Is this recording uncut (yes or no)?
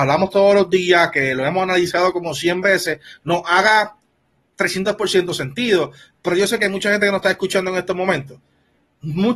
yes